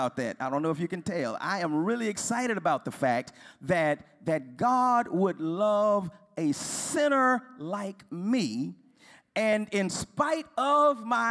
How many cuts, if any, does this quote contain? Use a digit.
0